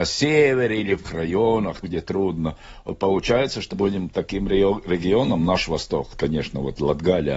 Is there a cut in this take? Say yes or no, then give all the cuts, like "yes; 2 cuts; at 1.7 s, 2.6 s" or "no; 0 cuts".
yes; 4 cuts; at 1.0 s, 1.8 s, 3.7 s, 6.1 s